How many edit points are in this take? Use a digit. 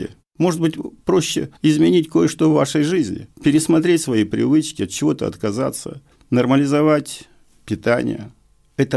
3